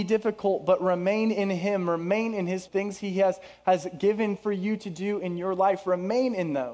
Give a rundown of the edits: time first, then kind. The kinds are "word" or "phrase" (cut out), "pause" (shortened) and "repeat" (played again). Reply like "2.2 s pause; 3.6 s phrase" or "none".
2.7 s phrase